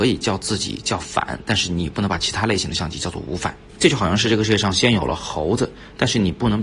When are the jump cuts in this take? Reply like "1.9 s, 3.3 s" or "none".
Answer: 3.7 s